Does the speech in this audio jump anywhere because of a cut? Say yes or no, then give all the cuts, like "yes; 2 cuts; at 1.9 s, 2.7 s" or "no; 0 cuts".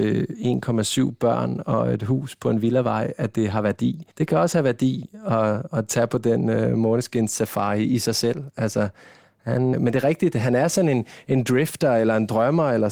yes; 2 cuts; at 4.1 s, 9.7 s